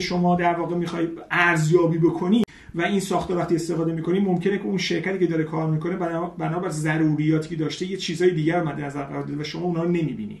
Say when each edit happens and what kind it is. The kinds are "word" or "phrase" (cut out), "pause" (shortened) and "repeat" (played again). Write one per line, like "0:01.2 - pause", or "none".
none